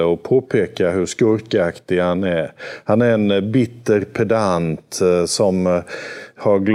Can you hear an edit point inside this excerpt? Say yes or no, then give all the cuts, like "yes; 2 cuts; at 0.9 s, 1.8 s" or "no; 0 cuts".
no; 0 cuts